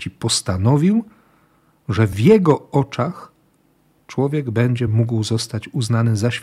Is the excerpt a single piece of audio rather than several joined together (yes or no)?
yes